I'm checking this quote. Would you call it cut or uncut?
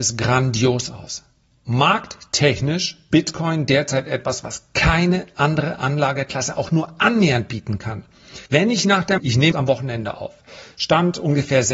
cut